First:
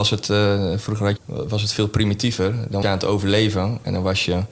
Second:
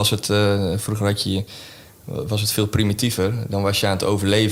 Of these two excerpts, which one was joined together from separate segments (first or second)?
first